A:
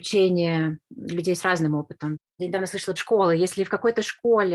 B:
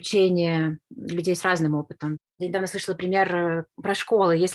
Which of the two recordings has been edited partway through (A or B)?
A